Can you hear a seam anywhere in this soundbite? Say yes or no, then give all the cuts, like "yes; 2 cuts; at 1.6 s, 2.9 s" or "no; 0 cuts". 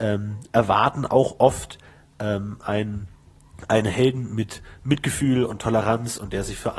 no; 0 cuts